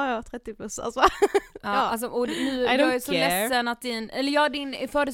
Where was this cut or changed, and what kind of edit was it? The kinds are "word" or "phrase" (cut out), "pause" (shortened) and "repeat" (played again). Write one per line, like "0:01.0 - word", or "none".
none